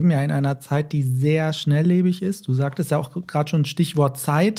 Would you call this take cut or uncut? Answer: uncut